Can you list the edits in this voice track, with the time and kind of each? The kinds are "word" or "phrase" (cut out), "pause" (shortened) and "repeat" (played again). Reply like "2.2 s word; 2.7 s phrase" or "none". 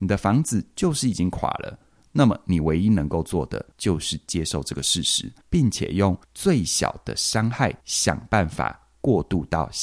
3.7 s pause; 5.4 s pause; 6.2 s pause; 7.8 s pause